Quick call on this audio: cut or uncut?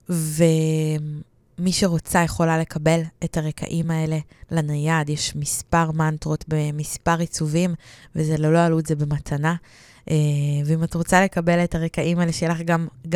uncut